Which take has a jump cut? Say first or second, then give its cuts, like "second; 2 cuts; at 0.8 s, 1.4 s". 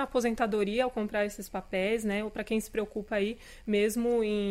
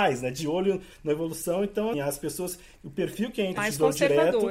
second; 2 cuts; at 1.9 s, 3.6 s